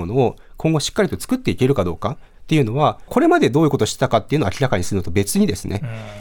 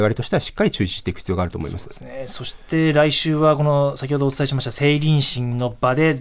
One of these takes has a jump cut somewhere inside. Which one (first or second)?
first